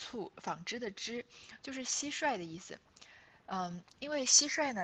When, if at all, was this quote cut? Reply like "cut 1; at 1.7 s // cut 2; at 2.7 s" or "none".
none

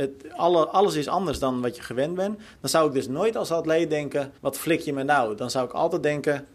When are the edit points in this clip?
cut 1; at 4.4 s

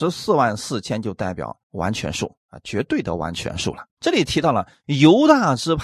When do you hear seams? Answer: cut 1; at 1.6 s // cut 2; at 3.9 s

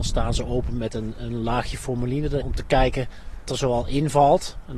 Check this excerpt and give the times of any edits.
cut 1; at 2.4 s // cut 2; at 3.4 s

